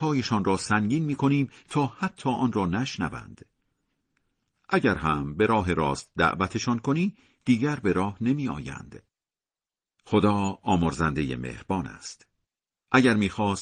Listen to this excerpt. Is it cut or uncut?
uncut